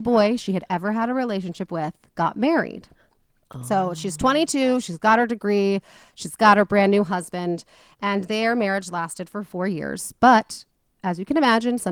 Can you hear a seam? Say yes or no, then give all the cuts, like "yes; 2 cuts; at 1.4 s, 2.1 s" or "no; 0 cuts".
no; 0 cuts